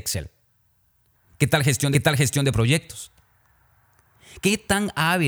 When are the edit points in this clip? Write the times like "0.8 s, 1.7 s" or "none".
1.9 s